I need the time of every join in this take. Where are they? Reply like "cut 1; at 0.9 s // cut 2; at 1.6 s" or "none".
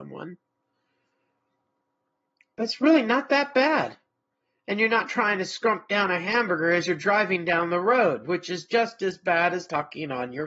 none